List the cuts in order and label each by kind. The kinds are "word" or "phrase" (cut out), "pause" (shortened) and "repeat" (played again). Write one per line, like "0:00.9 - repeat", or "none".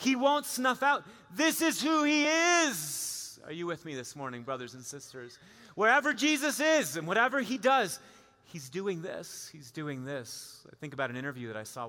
none